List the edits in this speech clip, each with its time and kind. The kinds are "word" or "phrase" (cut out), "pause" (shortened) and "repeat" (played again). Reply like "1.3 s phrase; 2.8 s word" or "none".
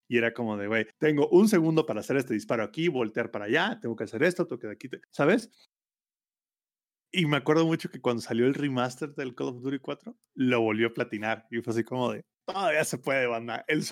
0.9 s pause; 5.0 s pause; 12.3 s pause